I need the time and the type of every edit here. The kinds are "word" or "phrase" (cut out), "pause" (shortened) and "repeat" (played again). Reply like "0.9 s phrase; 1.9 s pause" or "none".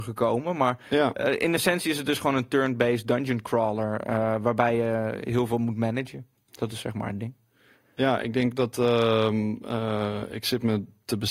none